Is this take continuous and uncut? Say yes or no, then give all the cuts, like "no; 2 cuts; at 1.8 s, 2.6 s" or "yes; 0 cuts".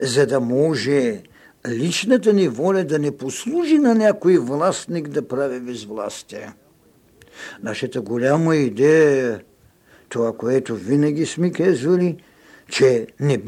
yes; 0 cuts